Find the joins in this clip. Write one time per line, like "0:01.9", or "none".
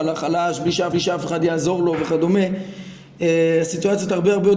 0:00.9